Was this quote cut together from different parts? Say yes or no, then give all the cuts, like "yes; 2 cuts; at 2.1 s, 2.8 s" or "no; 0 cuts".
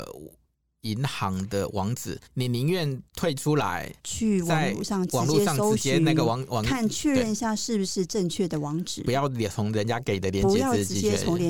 yes; 3 cuts; at 2.3 s, 3.1 s, 4.0 s